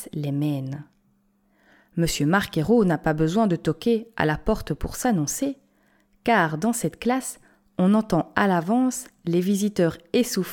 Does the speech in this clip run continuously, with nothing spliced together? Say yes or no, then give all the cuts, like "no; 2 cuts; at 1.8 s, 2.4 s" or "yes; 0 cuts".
yes; 0 cuts